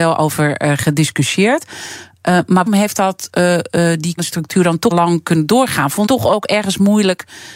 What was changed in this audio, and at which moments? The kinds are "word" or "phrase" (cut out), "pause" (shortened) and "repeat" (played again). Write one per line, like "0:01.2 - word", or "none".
0:02.7 - word
0:04.2 - word
0:04.9 - word
0:06.1 - word